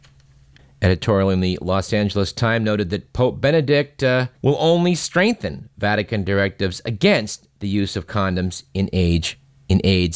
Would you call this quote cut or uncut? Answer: cut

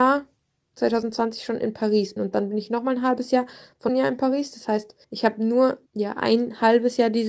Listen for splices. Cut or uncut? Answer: cut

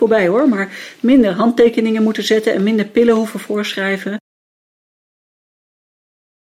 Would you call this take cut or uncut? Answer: uncut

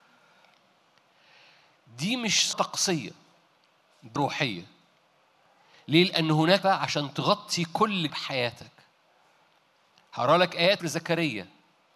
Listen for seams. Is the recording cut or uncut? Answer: cut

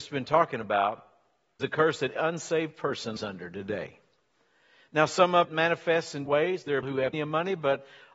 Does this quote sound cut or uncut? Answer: cut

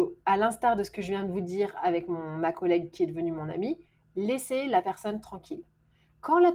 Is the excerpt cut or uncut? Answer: uncut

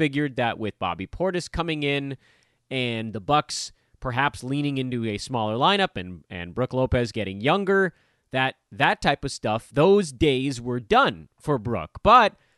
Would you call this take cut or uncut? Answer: uncut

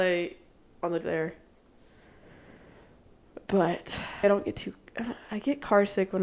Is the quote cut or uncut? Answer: cut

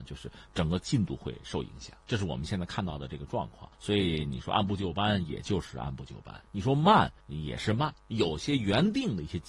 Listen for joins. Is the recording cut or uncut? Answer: cut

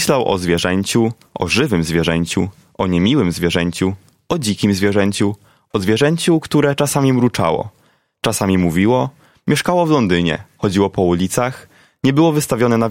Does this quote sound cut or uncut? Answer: uncut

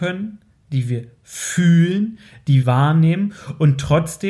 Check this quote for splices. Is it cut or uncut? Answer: cut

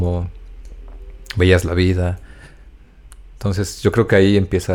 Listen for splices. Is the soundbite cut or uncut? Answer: uncut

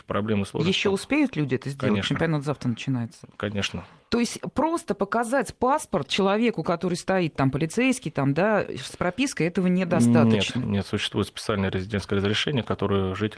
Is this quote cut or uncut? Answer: uncut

